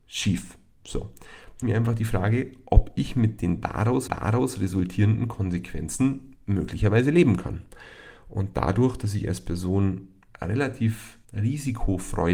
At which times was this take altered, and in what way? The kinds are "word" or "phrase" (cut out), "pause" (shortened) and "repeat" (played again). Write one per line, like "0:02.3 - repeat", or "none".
0:01.6 - phrase
0:04.1 - repeat
0:11.2 - pause